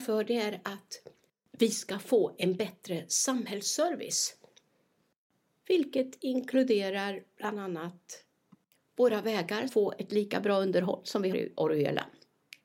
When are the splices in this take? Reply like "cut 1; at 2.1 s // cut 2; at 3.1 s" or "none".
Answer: cut 1; at 9.7 s // cut 2; at 11.3 s